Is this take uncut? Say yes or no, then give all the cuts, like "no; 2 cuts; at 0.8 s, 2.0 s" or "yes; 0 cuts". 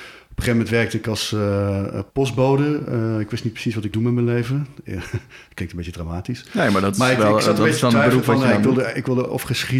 no; 2 cuts; at 2.1 s, 3.9 s